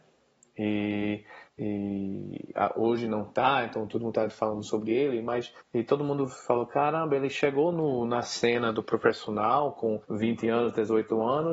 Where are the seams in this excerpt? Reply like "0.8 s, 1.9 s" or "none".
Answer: 1.5 s, 5.6 s, 10.0 s

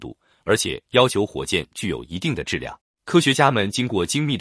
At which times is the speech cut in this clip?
2.8 s

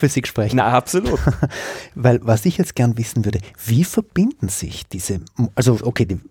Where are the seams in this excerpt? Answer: none

